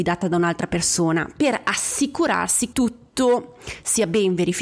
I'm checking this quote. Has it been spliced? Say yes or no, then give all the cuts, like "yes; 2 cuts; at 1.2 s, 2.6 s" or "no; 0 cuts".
yes; 1 cut; at 2.7 s